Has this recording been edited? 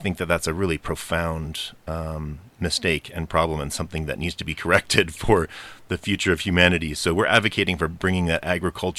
no; 0 cuts

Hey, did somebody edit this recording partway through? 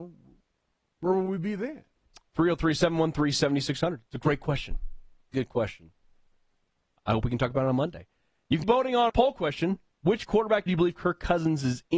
yes; 5 cuts; at 5.3 s, 7.0 s, 8.6 s, 9.1 s, 10.7 s

